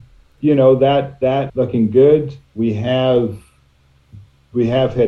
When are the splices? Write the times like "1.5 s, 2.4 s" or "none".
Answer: 1.5 s, 2.5 s